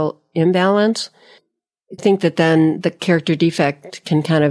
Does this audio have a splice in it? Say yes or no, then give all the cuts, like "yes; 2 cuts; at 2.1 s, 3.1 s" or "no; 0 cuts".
yes; 1 cut; at 2.0 s